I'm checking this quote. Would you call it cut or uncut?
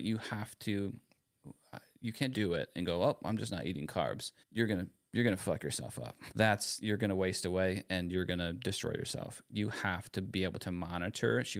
cut